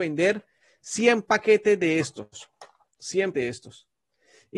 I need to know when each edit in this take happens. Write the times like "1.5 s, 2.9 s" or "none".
3.3 s